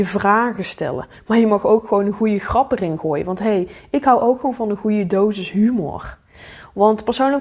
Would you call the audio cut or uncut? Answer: uncut